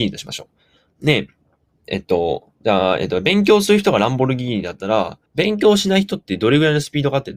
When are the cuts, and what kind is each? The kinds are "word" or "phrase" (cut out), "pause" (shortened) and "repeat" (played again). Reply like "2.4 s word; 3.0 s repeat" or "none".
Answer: 1.4 s pause; 2.6 s pause; 5.3 s pause